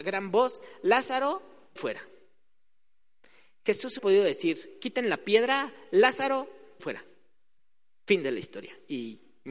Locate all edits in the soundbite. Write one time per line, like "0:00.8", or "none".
0:01.8
0:04.0
0:06.8